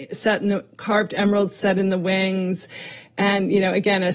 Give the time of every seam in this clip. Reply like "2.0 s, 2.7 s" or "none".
none